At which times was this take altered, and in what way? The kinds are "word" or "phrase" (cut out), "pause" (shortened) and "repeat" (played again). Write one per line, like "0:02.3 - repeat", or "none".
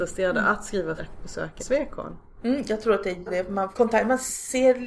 0:01.0 - word
0:01.6 - word
0:03.3 - word
0:03.7 - word